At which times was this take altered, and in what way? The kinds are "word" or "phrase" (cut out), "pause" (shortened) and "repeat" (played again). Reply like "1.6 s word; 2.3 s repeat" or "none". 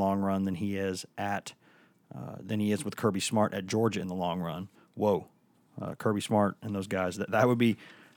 none

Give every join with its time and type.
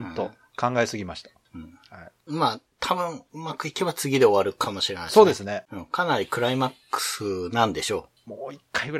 none

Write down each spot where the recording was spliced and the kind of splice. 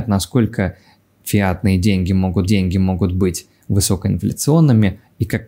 2.4 s repeat

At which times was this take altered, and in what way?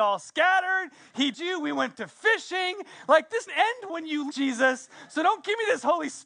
1.3 s word; 1.9 s word; 3.5 s word; 3.9 s word; 4.3 s word

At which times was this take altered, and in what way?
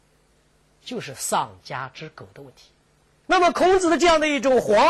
none

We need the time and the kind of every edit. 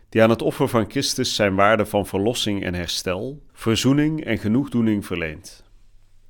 3.5 s pause

